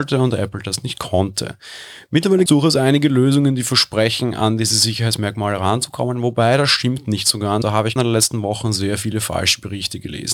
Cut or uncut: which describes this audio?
cut